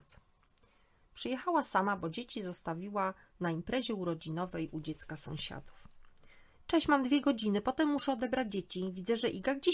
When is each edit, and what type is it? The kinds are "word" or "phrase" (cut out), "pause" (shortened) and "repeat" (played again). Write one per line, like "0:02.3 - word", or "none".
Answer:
none